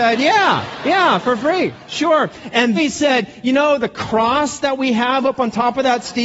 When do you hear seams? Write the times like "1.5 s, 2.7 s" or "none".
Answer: 2.8 s